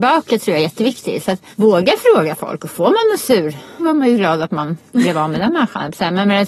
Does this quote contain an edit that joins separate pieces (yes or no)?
yes